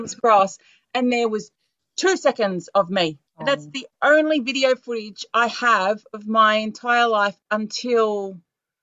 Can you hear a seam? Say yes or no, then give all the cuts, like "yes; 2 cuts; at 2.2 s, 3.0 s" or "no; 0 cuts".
yes; 1 cut; at 3.3 s